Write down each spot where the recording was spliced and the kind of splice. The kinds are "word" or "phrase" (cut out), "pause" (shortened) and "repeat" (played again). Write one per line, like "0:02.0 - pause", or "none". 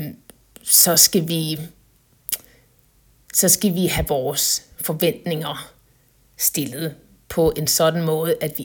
none